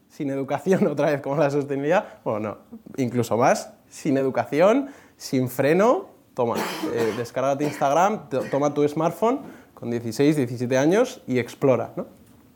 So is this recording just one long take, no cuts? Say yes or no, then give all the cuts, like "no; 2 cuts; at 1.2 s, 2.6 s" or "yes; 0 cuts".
yes; 0 cuts